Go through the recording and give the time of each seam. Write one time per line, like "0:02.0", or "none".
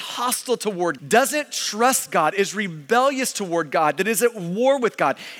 0:01.0